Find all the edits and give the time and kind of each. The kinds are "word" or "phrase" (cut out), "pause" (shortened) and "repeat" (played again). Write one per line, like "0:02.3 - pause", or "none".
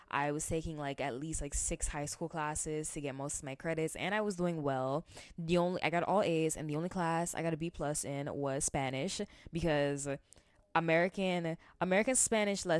none